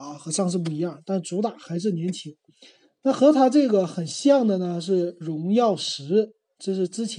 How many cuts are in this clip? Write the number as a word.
zero